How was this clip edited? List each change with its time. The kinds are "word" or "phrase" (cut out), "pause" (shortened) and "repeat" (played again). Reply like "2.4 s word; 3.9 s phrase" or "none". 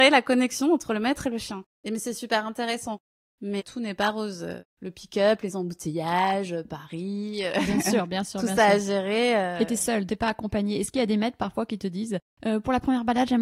1.7 s pause; 4.7 s pause; 10.1 s word